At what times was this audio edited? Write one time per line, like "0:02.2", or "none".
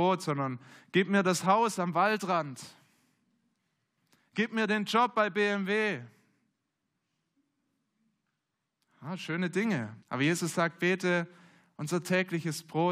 0:10.0